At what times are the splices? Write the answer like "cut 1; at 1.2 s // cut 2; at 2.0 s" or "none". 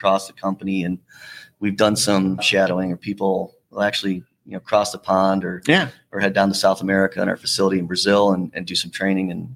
cut 1; at 2.4 s